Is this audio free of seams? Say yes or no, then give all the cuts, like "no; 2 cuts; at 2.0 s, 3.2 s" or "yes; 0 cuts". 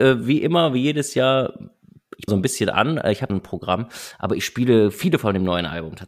no; 2 cuts; at 2.3 s, 3.3 s